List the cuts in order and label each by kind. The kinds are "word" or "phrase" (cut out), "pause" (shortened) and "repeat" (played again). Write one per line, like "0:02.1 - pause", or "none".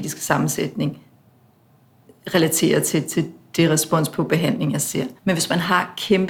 0:05.2 - pause